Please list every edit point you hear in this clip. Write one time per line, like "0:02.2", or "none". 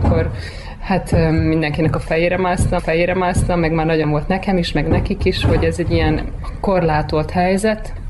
0:02.8
0:04.0